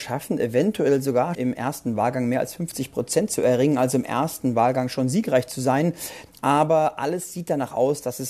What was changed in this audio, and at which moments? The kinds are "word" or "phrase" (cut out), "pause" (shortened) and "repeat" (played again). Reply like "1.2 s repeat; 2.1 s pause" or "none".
1.3 s word